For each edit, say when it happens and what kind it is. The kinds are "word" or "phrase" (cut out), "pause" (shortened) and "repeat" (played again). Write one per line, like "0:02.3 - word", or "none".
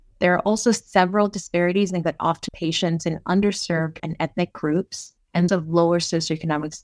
0:02.0 - word
0:02.5 - word
0:04.0 - word
0:05.5 - word